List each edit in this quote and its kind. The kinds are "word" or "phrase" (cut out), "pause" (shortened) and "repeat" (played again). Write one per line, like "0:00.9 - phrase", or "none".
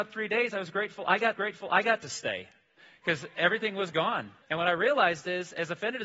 0:01.4 - repeat
0:04.4 - pause